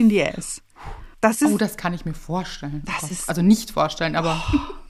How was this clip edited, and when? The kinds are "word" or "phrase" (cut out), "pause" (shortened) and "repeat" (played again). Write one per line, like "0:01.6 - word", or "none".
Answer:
0:01.1 - pause